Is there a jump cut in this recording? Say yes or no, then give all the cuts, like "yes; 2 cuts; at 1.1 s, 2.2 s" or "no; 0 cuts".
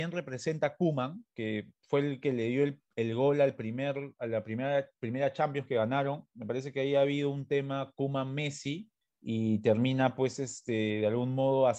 yes; 1 cut; at 9.0 s